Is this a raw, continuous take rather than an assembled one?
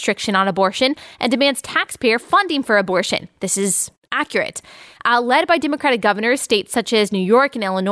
yes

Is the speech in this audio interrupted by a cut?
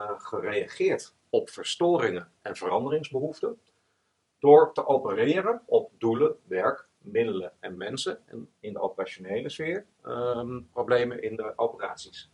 no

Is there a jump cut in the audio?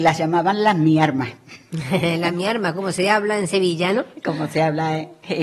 no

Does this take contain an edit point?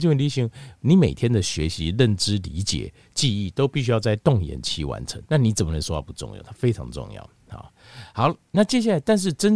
yes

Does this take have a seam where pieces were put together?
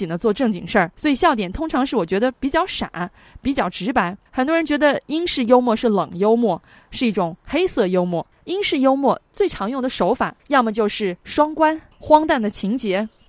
yes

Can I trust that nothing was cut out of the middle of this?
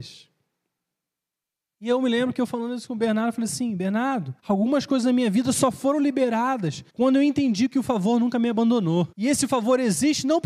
no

